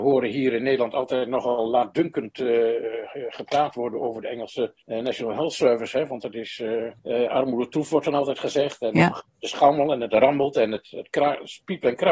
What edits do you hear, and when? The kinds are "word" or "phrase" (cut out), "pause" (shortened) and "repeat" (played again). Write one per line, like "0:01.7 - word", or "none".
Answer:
0:04.8 - pause
0:07.0 - pause